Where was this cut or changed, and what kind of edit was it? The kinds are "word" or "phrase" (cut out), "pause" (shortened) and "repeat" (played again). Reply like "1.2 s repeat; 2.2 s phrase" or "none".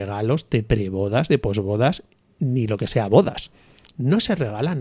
none

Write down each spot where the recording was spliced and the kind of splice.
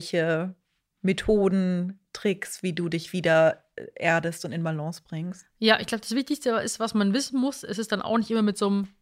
none

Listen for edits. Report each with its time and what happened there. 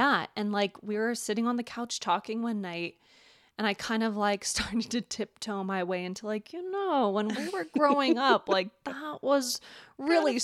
none

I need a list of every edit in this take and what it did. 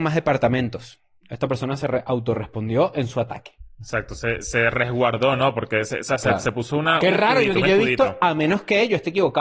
none

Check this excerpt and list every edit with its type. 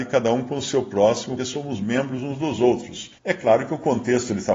1.4 s word; 3.2 s pause

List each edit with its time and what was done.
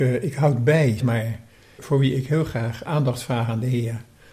1.0 s word; 1.8 s word; 2.9 s word

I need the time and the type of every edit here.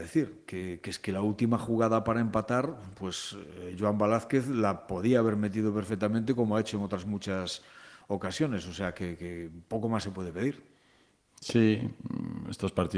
none

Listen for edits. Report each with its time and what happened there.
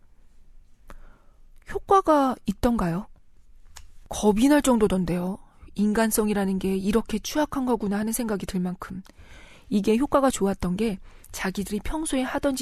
none

